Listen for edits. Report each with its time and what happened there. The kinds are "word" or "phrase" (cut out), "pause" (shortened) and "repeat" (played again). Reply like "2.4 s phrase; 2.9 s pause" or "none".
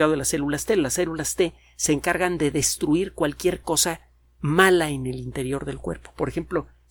none